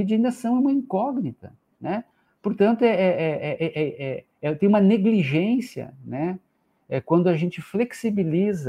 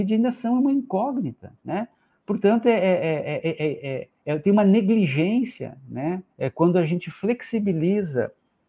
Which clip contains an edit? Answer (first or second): second